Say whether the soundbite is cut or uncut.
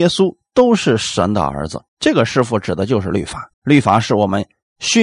cut